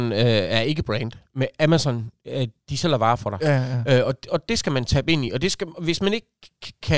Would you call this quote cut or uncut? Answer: uncut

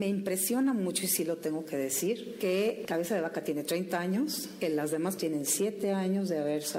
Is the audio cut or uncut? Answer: cut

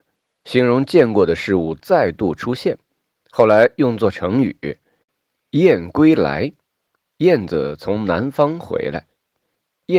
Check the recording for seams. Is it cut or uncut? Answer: uncut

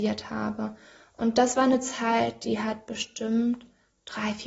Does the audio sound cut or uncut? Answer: uncut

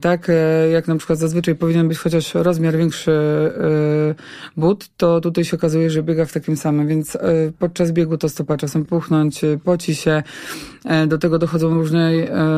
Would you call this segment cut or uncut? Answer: cut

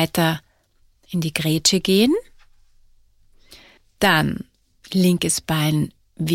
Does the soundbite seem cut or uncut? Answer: uncut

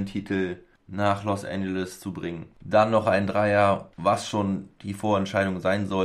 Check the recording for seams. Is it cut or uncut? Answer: uncut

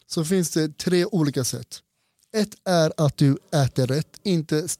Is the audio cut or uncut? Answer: uncut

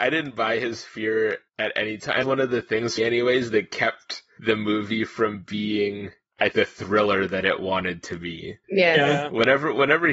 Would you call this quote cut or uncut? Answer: cut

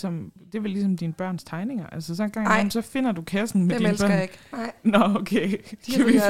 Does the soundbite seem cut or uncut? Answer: uncut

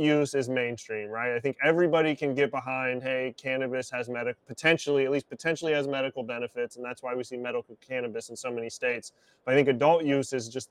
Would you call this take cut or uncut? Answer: uncut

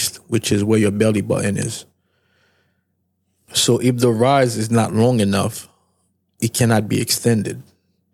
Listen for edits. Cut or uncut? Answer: uncut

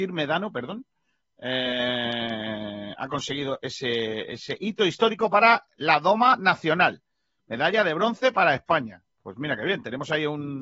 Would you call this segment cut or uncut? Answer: uncut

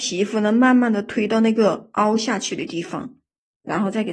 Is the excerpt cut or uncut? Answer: uncut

